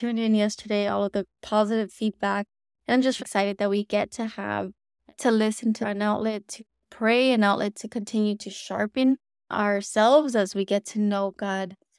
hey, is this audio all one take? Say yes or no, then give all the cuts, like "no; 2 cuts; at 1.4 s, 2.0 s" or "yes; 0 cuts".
no; 3 cuts; at 3.2 s, 5.2 s, 5.8 s